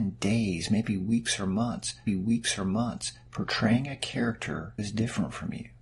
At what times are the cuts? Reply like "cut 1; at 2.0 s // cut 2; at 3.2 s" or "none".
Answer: cut 1; at 2.1 s // cut 2; at 4.8 s